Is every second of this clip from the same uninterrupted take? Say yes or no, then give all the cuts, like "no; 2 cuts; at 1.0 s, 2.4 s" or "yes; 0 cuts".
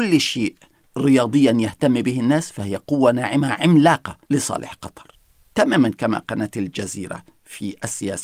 no; 1 cut; at 4.2 s